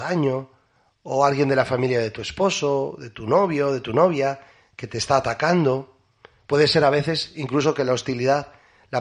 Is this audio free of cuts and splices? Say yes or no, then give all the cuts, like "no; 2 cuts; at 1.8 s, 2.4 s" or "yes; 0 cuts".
yes; 0 cuts